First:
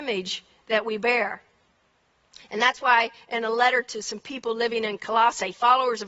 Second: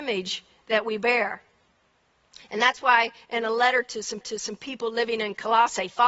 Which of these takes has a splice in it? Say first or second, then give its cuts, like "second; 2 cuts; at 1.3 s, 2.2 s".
second; 1 cut; at 4.2 s